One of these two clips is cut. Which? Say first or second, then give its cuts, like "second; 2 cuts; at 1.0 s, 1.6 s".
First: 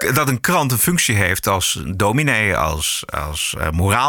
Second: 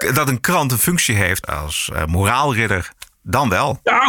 second; 1 cut; at 1.4 s